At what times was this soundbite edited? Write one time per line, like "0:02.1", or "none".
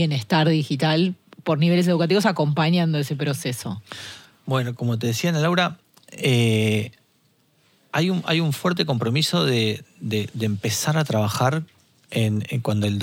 0:04.8